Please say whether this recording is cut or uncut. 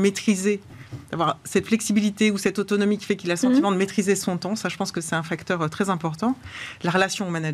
uncut